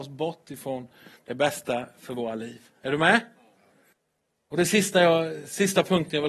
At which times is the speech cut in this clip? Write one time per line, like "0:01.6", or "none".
none